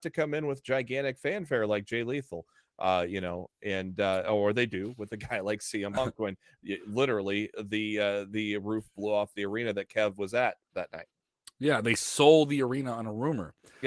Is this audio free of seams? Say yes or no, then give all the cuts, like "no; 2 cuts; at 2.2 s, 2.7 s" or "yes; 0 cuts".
yes; 0 cuts